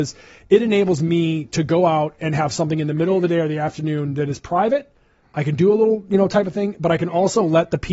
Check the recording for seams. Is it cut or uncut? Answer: uncut